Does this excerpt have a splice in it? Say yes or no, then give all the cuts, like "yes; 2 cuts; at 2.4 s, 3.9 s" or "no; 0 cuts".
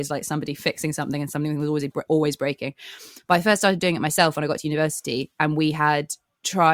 no; 0 cuts